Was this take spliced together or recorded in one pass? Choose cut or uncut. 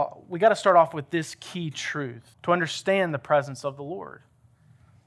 cut